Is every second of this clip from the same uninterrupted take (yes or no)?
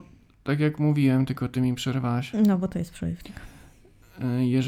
yes